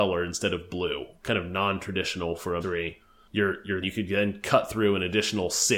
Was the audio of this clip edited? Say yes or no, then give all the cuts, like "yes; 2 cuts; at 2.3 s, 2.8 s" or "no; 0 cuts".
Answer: yes; 2 cuts; at 2.6 s, 3.8 s